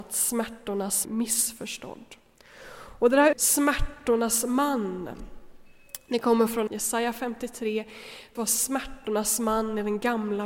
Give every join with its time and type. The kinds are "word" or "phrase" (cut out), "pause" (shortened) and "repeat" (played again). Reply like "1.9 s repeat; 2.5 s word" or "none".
1.0 s word; 3.3 s word; 6.7 s phrase; 8.3 s phrase